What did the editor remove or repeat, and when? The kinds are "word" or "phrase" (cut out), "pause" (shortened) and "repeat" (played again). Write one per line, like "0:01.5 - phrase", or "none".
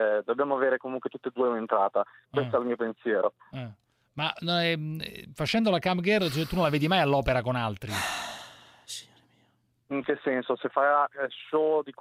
none